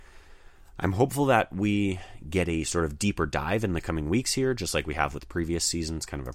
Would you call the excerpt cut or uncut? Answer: uncut